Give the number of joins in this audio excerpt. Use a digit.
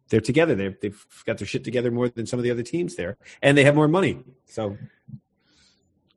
0